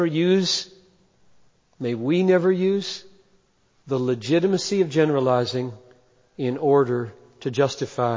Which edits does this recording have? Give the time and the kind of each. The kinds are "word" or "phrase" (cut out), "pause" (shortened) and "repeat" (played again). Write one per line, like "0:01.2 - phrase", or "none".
none